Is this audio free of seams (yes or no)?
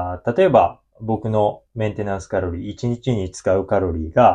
no